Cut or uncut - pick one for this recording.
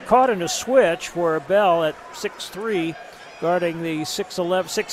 uncut